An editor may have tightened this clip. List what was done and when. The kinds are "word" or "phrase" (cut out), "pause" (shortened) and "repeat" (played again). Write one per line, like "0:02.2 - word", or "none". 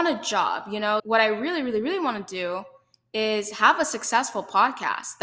0:01.0 - word